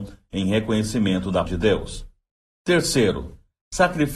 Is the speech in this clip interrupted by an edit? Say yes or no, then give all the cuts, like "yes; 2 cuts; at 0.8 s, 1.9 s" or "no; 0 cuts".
yes; 1 cut; at 1.5 s